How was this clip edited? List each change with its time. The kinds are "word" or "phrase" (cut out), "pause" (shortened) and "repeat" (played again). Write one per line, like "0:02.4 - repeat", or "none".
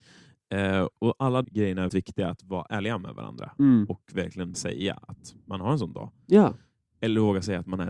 0:00.9 - word
0:01.4 - word
0:01.9 - word
0:02.4 - word
0:04.5 - word